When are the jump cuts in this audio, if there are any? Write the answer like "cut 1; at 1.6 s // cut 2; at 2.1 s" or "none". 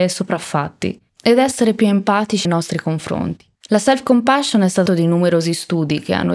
cut 1; at 1.1 s // cut 2; at 2.4 s // cut 3; at 3.5 s // cut 4; at 4.9 s